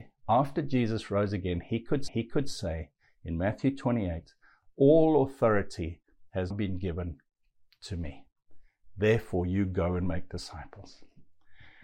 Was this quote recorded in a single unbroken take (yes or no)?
no